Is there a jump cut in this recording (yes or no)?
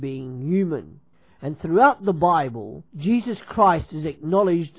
yes